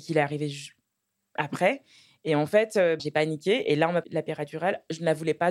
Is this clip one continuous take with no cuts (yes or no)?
no